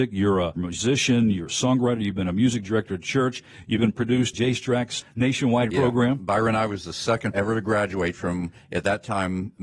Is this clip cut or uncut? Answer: cut